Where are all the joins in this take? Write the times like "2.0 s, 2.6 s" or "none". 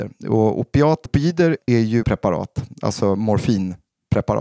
1.1 s, 1.7 s, 2.0 s